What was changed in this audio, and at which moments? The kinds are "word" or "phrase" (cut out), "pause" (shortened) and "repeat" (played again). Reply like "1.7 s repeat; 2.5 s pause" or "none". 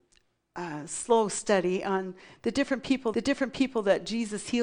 3.1 s repeat